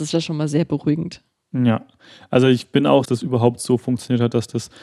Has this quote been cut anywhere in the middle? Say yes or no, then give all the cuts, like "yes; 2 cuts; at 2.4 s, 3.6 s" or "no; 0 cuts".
yes; 2 cuts; at 1.3 s, 3.1 s